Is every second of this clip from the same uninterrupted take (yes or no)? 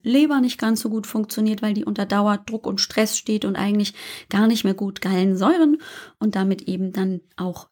yes